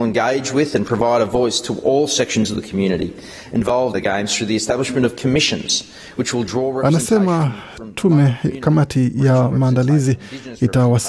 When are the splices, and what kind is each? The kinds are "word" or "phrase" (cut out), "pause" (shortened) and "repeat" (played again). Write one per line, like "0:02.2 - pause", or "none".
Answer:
0:03.9 - word